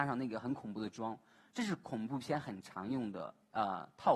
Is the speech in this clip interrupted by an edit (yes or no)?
no